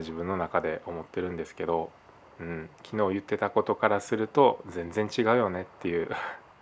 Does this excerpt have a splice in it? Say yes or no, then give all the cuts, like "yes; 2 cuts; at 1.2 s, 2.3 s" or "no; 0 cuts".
no; 0 cuts